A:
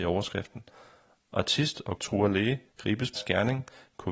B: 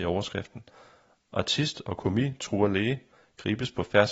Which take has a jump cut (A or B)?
A